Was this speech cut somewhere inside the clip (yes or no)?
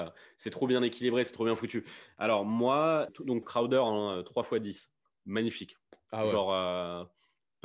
yes